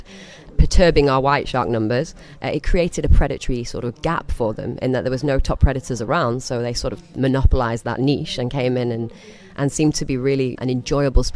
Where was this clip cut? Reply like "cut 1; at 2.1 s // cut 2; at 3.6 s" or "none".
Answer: none